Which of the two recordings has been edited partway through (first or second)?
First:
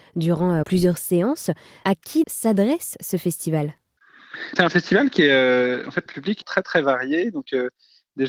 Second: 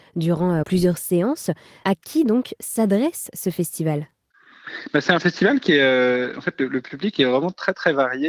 first